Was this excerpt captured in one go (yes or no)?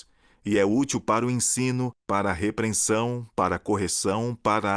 no